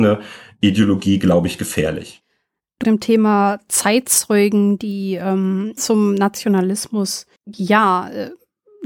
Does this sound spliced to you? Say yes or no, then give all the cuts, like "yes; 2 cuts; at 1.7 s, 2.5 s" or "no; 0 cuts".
yes; 3 cuts; at 2.8 s, 5.8 s, 7.4 s